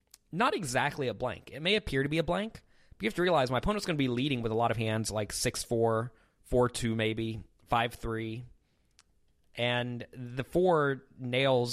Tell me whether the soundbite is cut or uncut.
uncut